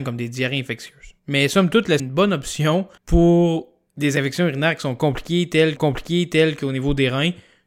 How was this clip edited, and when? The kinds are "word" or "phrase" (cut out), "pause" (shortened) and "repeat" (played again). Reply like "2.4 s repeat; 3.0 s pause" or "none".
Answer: 1.2 s pause; 2.0 s phrase; 3.0 s pause; 5.8 s repeat